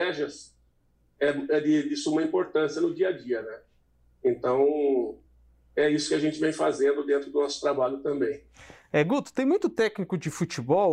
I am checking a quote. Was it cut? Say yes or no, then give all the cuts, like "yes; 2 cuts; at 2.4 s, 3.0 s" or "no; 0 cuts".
no; 0 cuts